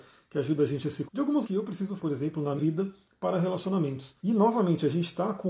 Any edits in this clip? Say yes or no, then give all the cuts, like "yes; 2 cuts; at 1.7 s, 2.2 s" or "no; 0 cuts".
yes; 5 cuts; at 1.1 s, 1.4 s, 2.0 s, 2.6 s, 4.2 s